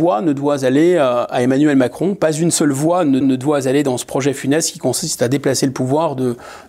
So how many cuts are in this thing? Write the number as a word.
one